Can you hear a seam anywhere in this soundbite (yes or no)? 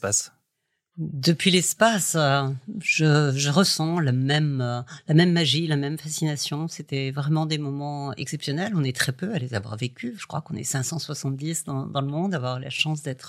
no